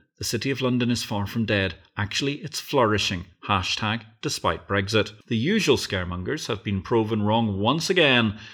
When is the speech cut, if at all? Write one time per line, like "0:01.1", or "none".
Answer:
0:05.2

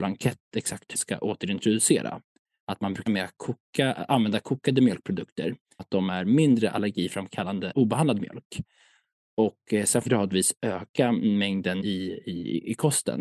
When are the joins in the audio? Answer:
0:00.9
0:03.1
0:05.8
0:07.7
0:10.1
0:11.8

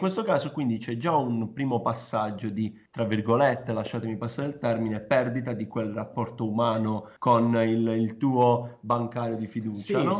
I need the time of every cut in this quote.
0:02.9
0:07.2

